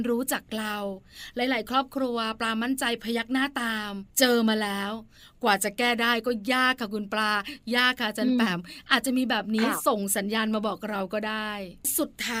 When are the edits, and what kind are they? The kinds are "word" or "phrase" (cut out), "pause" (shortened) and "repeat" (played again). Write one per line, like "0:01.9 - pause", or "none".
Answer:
0:04.1 - pause